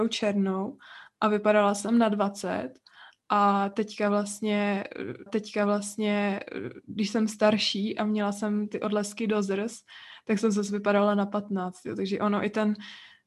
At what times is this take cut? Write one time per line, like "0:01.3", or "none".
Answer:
0:05.3